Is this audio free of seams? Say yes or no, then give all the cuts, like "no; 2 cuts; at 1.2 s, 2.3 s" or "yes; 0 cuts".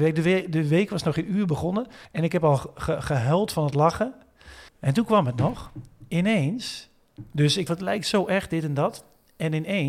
no; 3 cuts; at 2.1 s, 4.7 s, 7.7 s